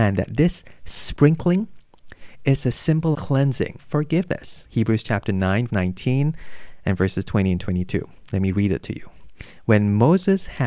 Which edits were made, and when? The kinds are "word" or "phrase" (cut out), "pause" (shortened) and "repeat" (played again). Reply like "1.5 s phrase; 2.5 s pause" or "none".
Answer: 3.1 s word; 3.8 s phrase; 5.7 s word